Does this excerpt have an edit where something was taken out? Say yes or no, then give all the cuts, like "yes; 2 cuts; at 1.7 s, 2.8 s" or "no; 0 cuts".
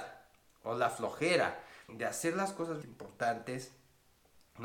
yes; 2 cuts; at 1.9 s, 2.8 s